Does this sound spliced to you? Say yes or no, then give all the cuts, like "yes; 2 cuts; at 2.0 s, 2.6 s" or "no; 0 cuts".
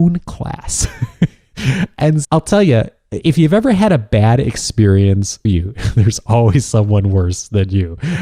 yes; 2 cuts; at 2.2 s, 5.5 s